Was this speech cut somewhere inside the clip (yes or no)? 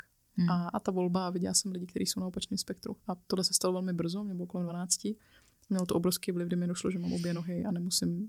no